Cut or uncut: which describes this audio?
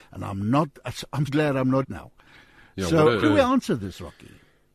cut